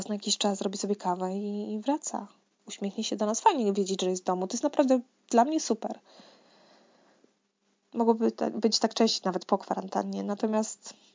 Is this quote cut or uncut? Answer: uncut